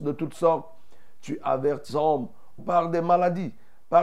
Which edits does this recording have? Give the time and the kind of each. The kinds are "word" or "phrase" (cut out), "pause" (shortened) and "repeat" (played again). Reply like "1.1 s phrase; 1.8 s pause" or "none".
1.9 s word; 2.6 s word